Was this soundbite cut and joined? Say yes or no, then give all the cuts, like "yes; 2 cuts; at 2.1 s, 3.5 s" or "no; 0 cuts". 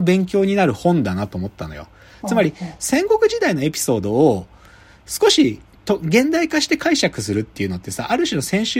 no; 0 cuts